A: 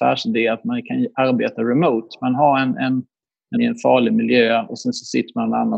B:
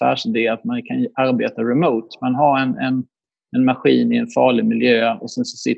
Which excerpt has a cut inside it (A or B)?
A